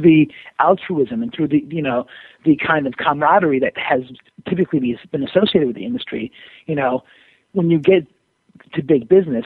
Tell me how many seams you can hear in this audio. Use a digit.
0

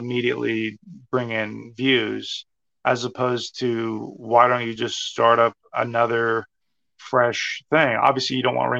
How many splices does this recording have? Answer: 0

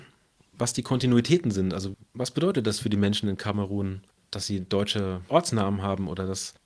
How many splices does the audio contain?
0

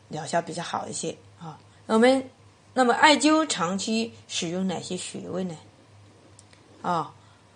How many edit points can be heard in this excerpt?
1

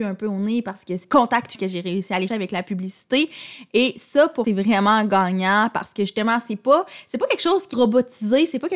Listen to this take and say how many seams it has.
5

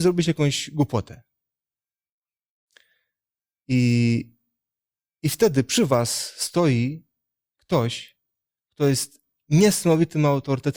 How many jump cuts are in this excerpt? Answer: 0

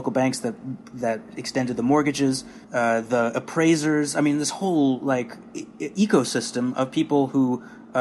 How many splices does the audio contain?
1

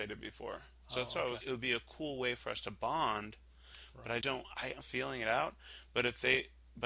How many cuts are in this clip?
3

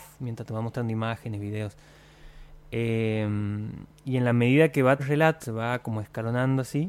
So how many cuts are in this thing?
3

